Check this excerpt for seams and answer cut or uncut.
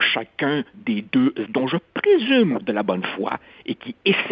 cut